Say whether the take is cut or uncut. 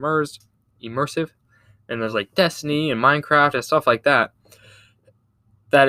uncut